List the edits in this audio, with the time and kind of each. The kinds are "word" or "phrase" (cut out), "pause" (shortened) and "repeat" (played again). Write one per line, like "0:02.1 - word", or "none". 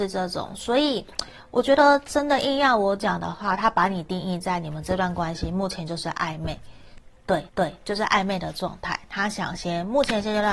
0:07.5 - repeat